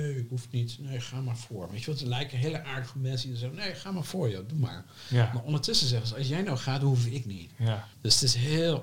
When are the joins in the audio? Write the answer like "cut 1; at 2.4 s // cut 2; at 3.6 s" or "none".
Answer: cut 1; at 7.9 s